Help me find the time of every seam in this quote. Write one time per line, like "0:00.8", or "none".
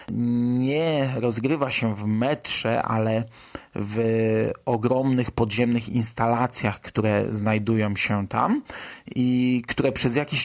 none